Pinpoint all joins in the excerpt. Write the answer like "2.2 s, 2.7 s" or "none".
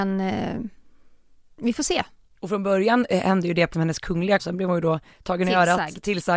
3.7 s, 4.4 s